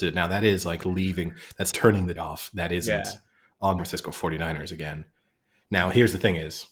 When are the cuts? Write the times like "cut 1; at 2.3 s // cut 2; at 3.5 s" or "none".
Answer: cut 1; at 1.7 s // cut 2; at 2.2 s // cut 3; at 3.8 s